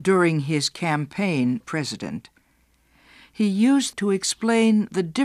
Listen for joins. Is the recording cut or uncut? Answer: cut